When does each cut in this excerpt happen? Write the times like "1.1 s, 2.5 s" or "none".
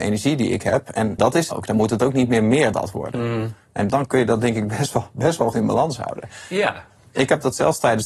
1.2 s, 1.5 s, 2.7 s, 3.9 s, 5.5 s